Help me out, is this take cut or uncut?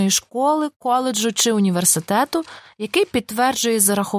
uncut